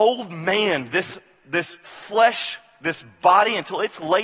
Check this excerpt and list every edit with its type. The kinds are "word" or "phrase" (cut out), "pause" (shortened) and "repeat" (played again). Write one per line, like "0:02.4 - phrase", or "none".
none